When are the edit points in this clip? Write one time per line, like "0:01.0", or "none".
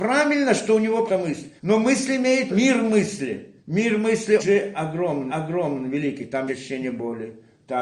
0:01.1
0:01.6
0:02.5
0:03.6
0:04.4
0:05.3
0:06.5